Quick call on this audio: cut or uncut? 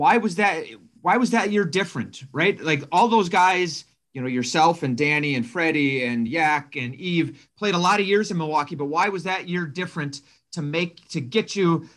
uncut